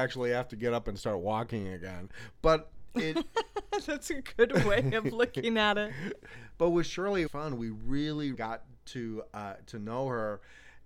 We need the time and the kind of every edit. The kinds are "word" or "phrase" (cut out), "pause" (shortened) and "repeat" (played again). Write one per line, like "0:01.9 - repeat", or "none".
0:07.3 - phrase
0:08.3 - word